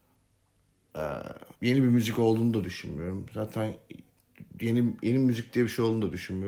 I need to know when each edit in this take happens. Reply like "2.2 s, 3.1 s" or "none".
1.5 s